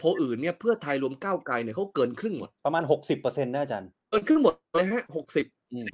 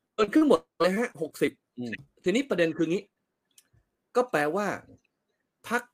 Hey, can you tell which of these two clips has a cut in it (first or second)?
first